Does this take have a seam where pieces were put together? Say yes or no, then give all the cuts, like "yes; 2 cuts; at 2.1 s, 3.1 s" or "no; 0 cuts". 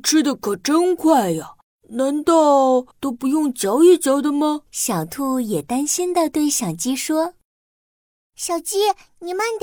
yes; 3 cuts; at 1.6 s, 2.9 s, 4.7 s